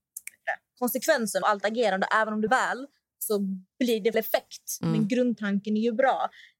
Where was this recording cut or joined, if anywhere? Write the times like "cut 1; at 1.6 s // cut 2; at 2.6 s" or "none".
cut 1; at 1.4 s // cut 2; at 2.5 s // cut 3; at 4.1 s